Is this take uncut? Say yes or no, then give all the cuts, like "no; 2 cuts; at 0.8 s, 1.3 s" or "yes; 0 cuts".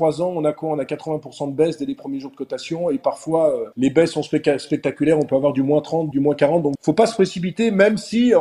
no; 3 cuts; at 3.7 s, 6.1 s, 6.8 s